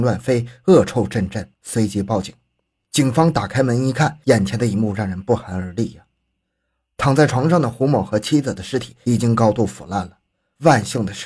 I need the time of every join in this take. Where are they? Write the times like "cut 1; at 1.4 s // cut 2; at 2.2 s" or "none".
cut 1; at 1.5 s